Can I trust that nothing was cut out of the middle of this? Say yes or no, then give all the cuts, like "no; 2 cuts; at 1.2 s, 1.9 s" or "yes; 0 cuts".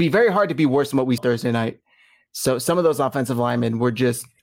no; 1 cut; at 1.2 s